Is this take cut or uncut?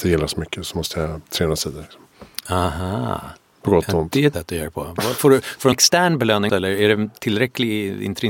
cut